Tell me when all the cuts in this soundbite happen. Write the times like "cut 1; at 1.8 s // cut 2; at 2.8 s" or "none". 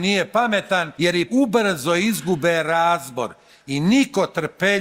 cut 1; at 0.9 s // cut 2; at 1.3 s